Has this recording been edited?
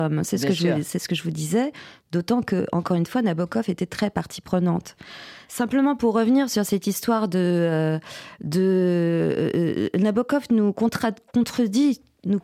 no; 0 cuts

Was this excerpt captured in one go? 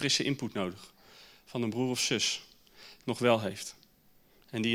no; 1 cut; at 3.0 s

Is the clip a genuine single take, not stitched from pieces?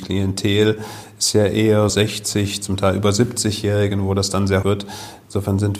no; 2 cuts; at 1.9 s, 4.6 s

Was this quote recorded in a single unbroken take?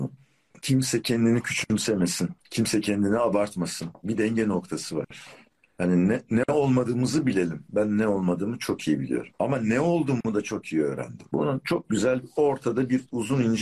no; 1 cut; at 2.4 s

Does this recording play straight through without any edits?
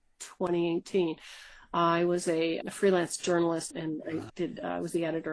no; 3 cuts; at 2.6 s, 3.7 s, 4.3 s

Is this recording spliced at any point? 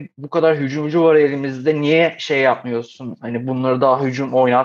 no; 0 cuts

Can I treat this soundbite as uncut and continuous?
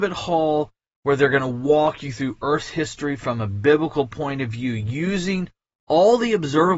yes; 0 cuts

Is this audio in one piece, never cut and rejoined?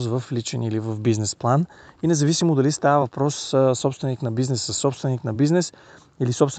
yes; 0 cuts

